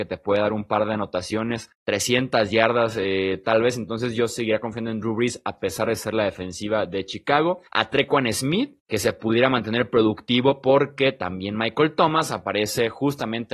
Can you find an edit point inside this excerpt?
yes; 3 cuts; at 1.7 s, 7.7 s, 8.8 s

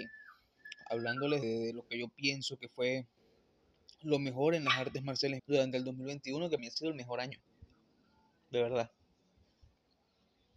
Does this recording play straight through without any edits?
no; 3 cuts; at 1.4 s, 5.4 s, 6.6 s

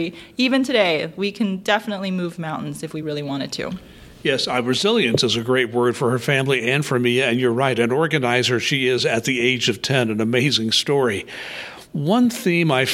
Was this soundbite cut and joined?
no; 0 cuts

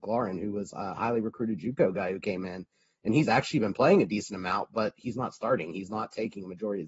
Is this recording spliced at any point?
no; 0 cuts

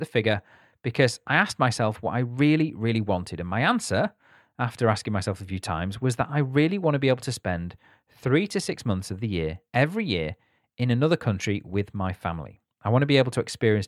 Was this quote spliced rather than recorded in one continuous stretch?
no; 0 cuts

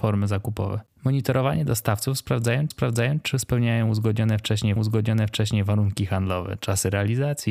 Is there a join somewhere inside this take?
yes; 2 cuts; at 2.7 s, 4.8 s

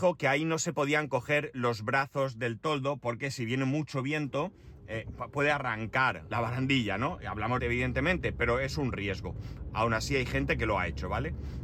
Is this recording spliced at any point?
yes; 2 cuts; at 6.3 s, 7.6 s

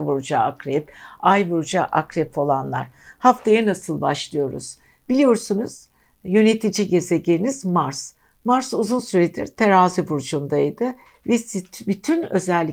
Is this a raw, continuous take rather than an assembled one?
yes; 0 cuts

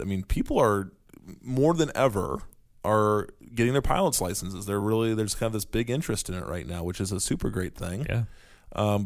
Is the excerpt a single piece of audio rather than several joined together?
yes; 0 cuts

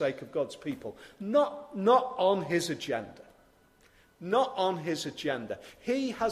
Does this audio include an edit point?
no; 0 cuts

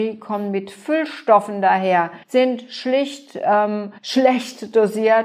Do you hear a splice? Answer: yes; 2 cuts; at 2.2 s, 4.0 s

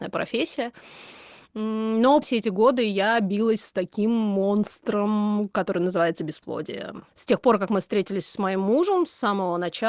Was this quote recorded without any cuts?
no; 1 cut; at 2.2 s

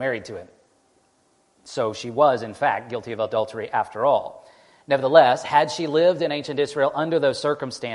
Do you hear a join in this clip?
no; 0 cuts

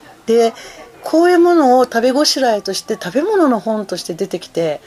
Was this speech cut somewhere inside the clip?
yes; 1 cut; at 0.9 s

